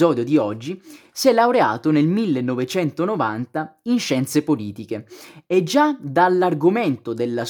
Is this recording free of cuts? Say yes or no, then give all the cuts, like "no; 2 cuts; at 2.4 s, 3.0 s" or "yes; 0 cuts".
yes; 0 cuts